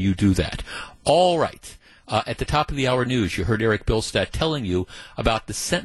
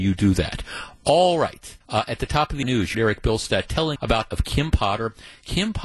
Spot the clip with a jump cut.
second; 5 cuts; at 1.8 s, 2.6 s, 2.9 s, 4.0 s, 4.3 s

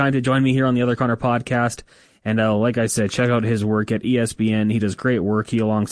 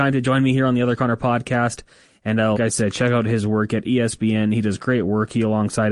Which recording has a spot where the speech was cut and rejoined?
second; 1 cut; at 2.6 s

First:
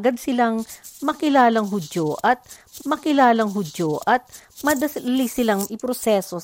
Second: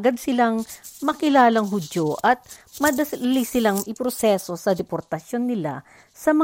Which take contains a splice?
first; 1 cut; at 2.8 s

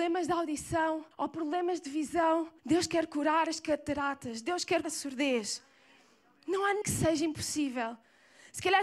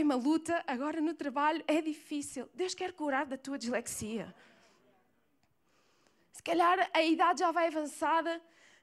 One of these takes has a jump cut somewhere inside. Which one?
first; 4 cuts; at 1.1 s, 2.6 s, 4.8 s, 6.8 s

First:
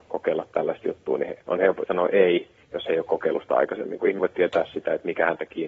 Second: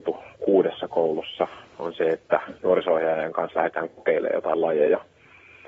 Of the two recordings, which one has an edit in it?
first; 2 cuts; at 1.8 s, 4.2 s

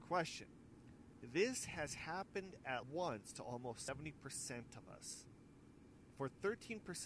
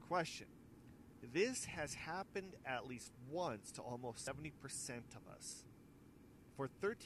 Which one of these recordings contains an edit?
first; 1 cut; at 2.8 s

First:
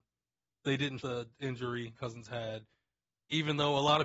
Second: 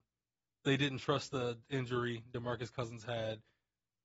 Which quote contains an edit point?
first; 2 cuts; at 1.0 s, 1.9 s

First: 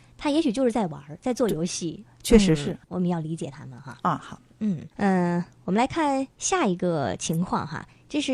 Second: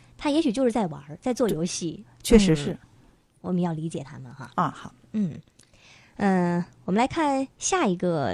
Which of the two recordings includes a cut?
first; 2 cuts; at 2.8 s, 4.9 s

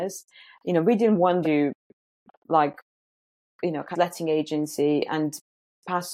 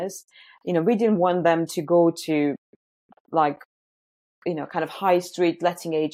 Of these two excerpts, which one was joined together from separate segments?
first; 2 cuts; at 1.4 s, 3.9 s

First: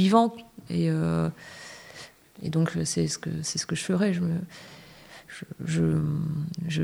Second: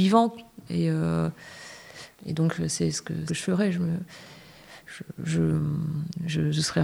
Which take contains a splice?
second; 2 cuts; at 2.1 s, 3.3 s

